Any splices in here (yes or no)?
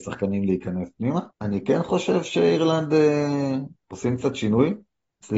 yes